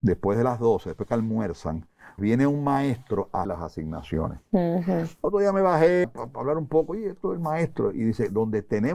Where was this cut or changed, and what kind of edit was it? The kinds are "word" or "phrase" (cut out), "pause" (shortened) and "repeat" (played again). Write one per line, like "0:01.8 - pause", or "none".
0:02.2 - word
0:03.4 - word
0:06.0 - word